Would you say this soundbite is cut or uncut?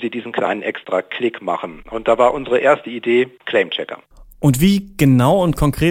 uncut